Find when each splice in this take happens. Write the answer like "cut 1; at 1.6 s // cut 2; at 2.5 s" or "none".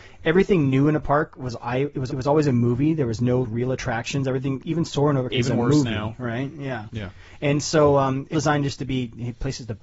cut 1; at 2.1 s // cut 2; at 3.4 s // cut 3; at 4.6 s // cut 4; at 5.3 s // cut 5; at 8.3 s